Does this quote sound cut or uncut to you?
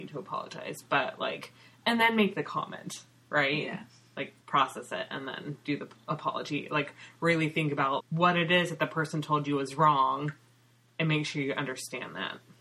cut